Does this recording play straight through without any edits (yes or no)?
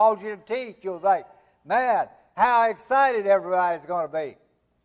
yes